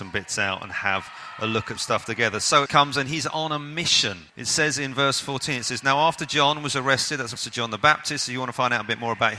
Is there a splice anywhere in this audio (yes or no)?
yes